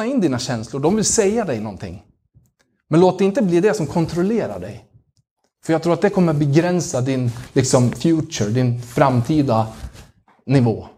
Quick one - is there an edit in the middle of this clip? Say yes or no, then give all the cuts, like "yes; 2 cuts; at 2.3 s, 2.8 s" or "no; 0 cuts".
no; 0 cuts